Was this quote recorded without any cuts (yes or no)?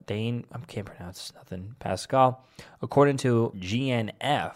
no